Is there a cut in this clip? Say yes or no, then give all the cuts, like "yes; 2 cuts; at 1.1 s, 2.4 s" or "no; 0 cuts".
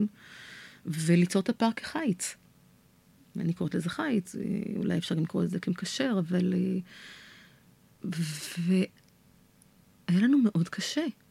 no; 0 cuts